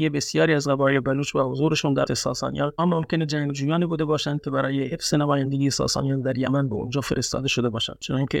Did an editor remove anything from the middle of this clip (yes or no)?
yes